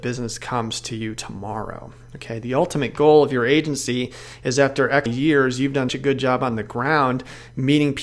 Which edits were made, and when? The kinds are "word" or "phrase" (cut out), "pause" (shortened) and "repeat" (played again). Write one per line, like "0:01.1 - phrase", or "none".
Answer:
0:05.1 - word
0:05.9 - word